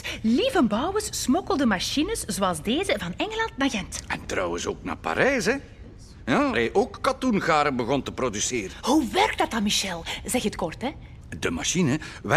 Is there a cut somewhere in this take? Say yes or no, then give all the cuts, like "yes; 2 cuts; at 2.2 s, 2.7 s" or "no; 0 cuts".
yes; 1 cut; at 6.5 s